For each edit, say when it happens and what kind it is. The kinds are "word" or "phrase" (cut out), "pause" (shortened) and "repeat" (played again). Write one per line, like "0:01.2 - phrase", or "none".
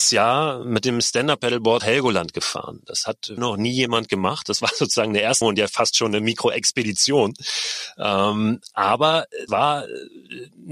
0:01.8 - word
0:03.4 - word
0:05.4 - word
0:09.5 - word

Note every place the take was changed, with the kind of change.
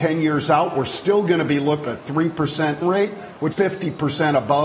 0:01.9 - word
0:02.8 - word
0:03.5 - word

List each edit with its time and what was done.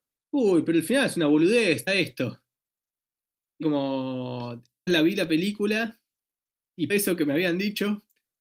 0:01.9 - word
0:03.6 - word
0:04.9 - word
0:06.9 - word

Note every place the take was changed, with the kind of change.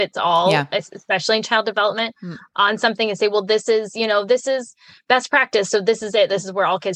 none

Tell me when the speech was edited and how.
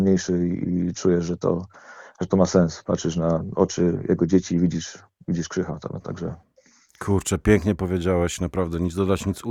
none

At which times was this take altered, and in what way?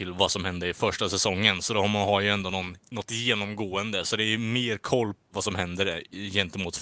0:05.2 - word

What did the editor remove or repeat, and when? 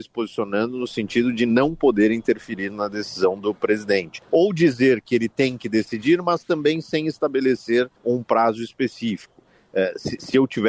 0:04.2 - pause
0:08.0 - pause

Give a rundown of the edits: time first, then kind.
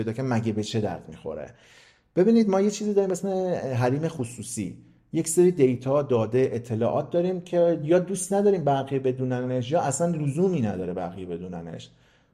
none

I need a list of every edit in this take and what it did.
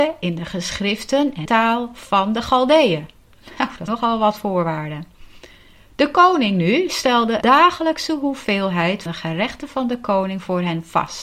0:01.5 - word
0:03.9 - word
0:07.4 - word
0:09.1 - word

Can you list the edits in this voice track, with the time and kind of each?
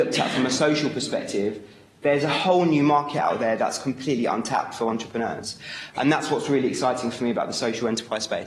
none

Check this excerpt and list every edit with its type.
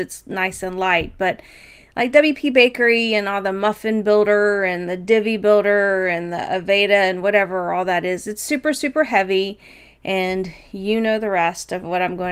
none

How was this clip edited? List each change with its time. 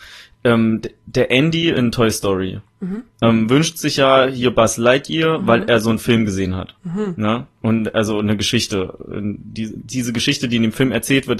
0:06.8 - pause

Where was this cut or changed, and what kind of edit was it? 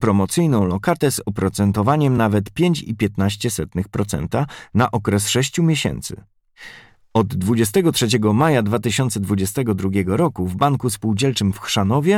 none

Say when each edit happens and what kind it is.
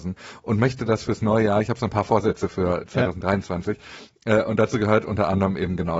none

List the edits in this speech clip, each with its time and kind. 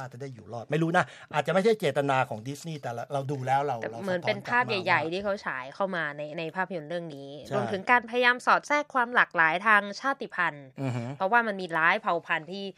none

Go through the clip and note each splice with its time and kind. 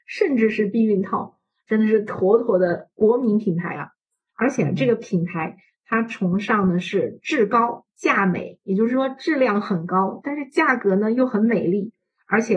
none

